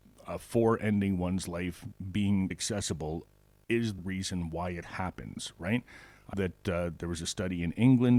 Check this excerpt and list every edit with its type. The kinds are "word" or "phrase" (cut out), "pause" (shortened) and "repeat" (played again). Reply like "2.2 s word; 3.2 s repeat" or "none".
2.5 s word; 4.0 s word; 4.8 s word; 6.3 s word